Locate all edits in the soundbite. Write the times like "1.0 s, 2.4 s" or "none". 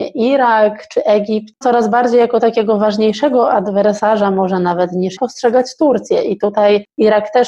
1.6 s, 5.2 s